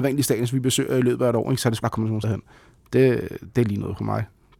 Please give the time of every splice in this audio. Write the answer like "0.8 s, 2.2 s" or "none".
1.8 s, 2.2 s